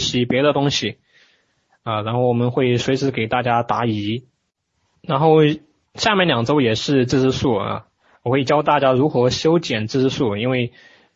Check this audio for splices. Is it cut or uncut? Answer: uncut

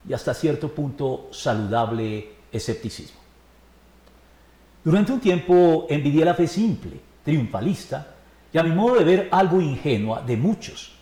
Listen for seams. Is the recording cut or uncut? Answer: uncut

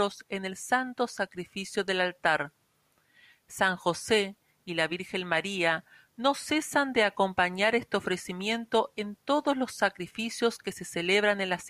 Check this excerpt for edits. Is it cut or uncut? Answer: uncut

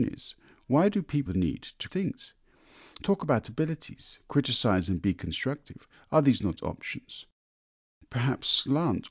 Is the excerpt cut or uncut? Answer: cut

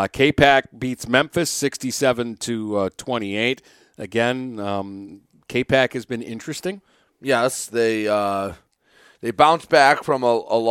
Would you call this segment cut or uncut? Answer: uncut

